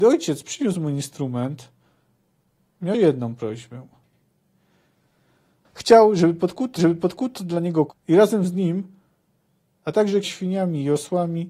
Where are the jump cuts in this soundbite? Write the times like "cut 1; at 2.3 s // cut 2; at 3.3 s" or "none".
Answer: cut 1; at 2.9 s // cut 2; at 6.8 s // cut 3; at 7.9 s // cut 4; at 9.7 s // cut 5; at 10.2 s